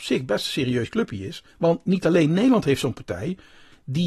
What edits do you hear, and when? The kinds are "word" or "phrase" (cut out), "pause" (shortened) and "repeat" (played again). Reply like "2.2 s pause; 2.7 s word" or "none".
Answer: 1.5 s pause